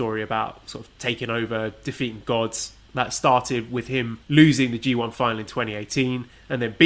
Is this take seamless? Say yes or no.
no